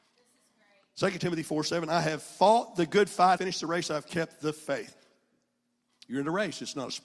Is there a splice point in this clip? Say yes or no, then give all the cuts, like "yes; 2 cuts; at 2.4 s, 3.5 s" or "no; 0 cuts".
yes; 1 cut; at 3.4 s